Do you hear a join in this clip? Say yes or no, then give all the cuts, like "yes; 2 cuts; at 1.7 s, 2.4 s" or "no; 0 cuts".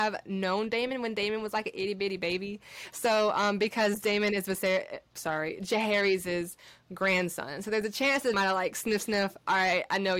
yes; 2 cuts; at 5.1 s, 8.3 s